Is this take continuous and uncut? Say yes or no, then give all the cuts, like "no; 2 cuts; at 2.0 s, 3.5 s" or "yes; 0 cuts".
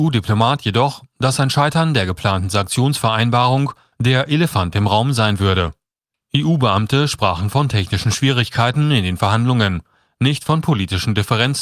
yes; 0 cuts